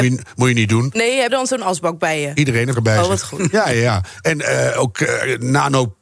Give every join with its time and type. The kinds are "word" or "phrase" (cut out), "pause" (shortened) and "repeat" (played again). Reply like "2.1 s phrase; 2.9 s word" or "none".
1.3 s word; 2.7 s phrase